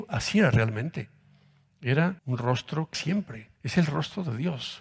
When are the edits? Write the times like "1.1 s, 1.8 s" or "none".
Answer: 2.2 s, 2.9 s, 3.5 s